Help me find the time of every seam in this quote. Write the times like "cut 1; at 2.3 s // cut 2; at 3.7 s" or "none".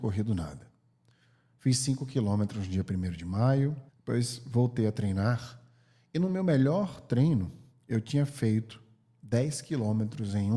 cut 1; at 3.9 s